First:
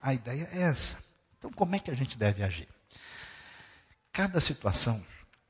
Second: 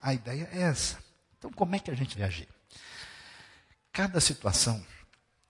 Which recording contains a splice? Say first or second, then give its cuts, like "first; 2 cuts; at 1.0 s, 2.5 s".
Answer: second; 1 cut; at 2.2 s